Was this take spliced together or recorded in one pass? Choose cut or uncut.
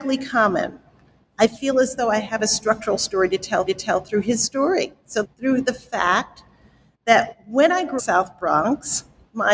cut